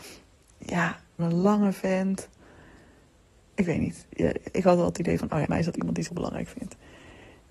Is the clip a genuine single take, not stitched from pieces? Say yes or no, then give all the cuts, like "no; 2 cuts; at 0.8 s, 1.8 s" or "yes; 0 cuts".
no; 3 cuts; at 1.2 s, 5.5 s, 6.1 s